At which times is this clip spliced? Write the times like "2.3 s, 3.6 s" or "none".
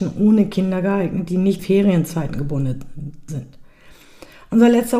1.6 s, 3.3 s